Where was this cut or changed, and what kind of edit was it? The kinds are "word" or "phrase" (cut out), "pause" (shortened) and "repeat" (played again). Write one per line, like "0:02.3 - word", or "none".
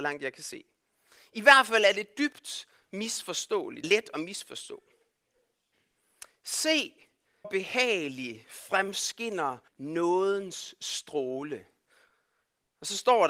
0:03.8 - word
0:07.4 - word
0:09.7 - pause

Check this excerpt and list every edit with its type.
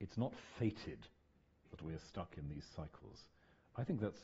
none

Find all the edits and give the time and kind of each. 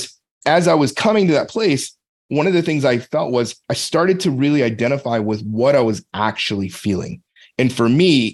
0:03.6 - pause

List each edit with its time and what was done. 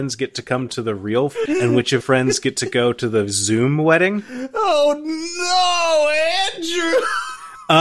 0:01.5 - word
0:02.0 - word

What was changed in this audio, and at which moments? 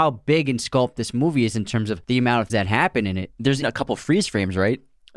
0:02.0 - pause
0:02.5 - word
0:03.6 - word

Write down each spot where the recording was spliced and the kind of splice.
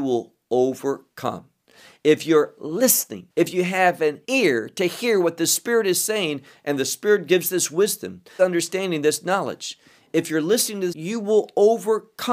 0:03.3 - pause
0:04.2 - pause
0:08.4 - word
0:10.9 - word

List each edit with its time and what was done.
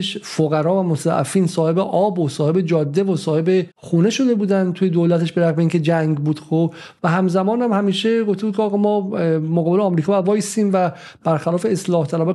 0:03.7 - pause

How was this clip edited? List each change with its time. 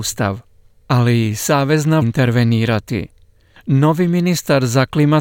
0:02.0 - phrase

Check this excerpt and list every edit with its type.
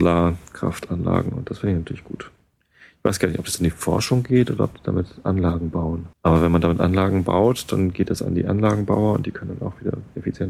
0:06.1 - pause

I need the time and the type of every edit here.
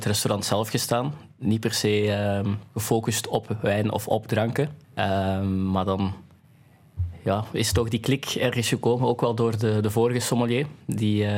0:02.7 - pause
0:04.8 - pause

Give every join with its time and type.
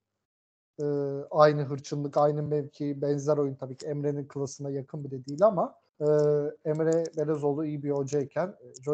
0:05.9 - pause

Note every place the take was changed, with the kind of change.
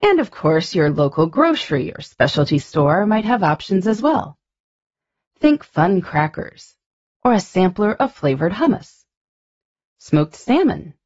none

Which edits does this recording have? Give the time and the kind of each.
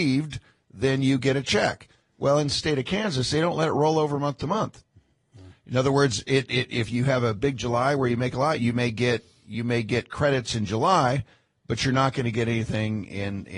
none

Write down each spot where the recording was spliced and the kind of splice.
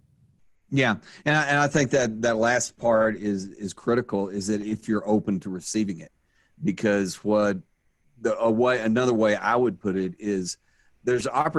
none

